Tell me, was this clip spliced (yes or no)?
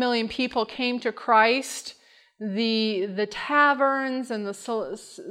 no